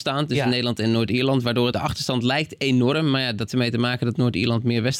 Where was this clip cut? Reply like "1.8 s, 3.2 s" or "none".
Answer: 1.7 s, 3.5 s